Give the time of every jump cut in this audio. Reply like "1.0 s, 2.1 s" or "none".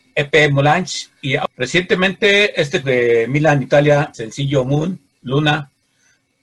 2.8 s, 4.1 s